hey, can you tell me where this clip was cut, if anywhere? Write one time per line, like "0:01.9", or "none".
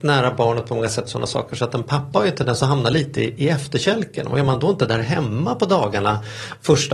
none